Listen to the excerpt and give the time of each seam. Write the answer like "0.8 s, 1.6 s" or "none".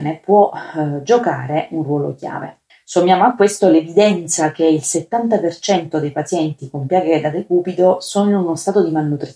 2.7 s